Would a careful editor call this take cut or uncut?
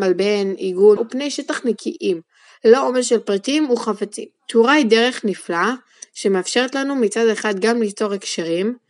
cut